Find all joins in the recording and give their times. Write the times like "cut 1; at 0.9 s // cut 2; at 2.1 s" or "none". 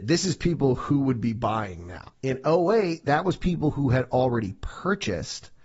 cut 1; at 2.1 s